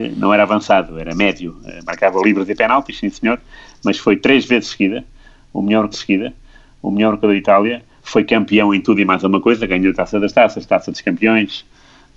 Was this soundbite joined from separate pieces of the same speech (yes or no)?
yes